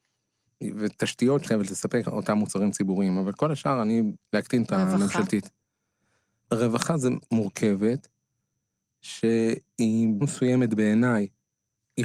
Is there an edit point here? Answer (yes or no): yes